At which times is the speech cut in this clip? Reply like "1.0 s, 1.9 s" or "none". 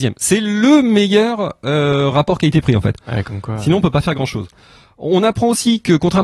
none